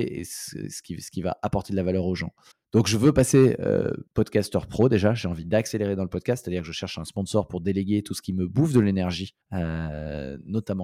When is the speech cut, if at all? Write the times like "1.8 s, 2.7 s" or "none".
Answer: 2.5 s, 4.1 s, 9.4 s